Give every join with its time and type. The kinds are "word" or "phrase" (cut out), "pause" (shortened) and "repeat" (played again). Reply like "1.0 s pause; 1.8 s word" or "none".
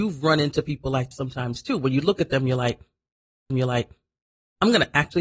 1.1 s word; 3.5 s repeat

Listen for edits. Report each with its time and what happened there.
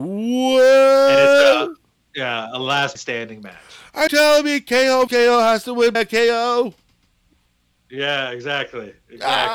2.9 s word; 4.1 s word; 5.1 s word; 5.9 s word

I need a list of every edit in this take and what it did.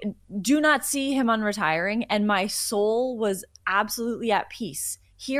none

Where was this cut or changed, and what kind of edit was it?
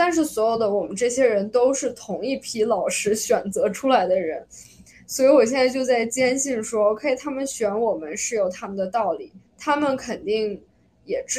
9.5 s pause

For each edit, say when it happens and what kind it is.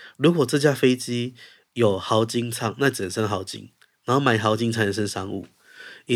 none

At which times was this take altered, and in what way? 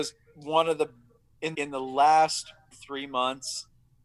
1.5 s word; 2.7 s word

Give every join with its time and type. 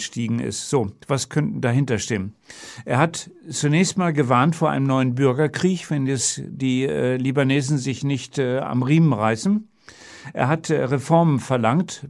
none

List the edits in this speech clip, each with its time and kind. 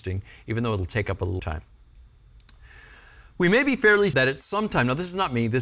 1.4 s word; 4.1 s word

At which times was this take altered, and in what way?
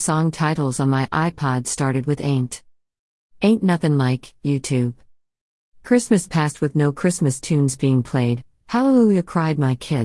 none

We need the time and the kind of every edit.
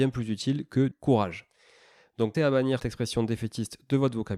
0.9 s word; 2.3 s word; 2.8 s word

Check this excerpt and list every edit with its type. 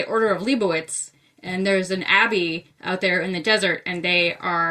none

